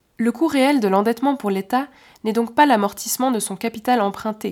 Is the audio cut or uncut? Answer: uncut